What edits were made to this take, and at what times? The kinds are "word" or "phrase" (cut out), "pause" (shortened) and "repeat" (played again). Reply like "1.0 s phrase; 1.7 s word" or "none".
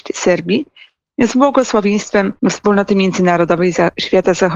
2.4 s pause